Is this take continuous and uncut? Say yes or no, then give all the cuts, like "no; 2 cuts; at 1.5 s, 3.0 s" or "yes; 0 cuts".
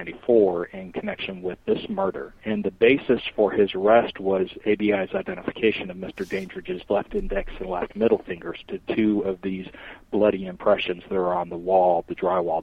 no; 2 cuts; at 2.4 s, 8.8 s